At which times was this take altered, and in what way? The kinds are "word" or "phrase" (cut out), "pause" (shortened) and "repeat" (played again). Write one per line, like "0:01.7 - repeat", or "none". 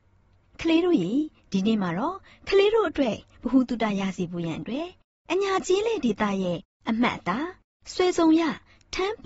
none